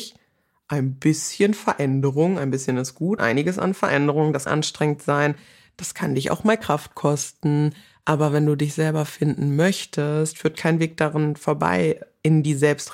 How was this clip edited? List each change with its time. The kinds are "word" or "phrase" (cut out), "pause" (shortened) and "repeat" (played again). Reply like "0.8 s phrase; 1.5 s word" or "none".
3.2 s word; 4.5 s word